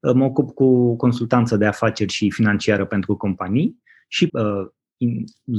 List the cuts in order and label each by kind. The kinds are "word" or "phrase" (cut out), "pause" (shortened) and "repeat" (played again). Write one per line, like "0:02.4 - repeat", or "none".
0:04.3 - word